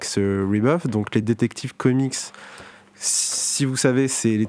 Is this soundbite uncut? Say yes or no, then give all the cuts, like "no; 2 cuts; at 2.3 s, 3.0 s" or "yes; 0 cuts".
yes; 0 cuts